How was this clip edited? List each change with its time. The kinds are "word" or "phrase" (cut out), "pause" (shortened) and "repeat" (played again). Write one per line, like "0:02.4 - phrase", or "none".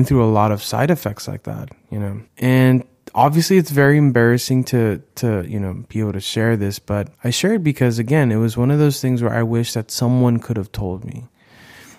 0:02.3 - pause
0:07.1 - pause